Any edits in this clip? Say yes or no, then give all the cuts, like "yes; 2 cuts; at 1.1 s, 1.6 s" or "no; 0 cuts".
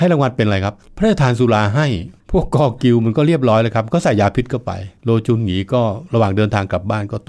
yes; 2 cuts; at 2.2 s, 5.0 s